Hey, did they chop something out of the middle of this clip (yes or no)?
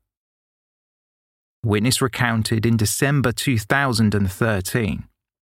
no